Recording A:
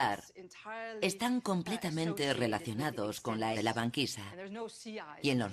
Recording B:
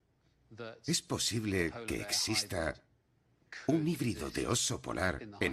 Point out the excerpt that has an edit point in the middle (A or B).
A